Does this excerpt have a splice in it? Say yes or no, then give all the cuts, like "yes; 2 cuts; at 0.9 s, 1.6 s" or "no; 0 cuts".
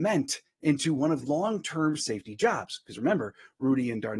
yes; 2 cuts; at 1.2 s, 2.0 s